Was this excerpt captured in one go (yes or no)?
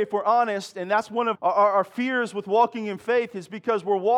no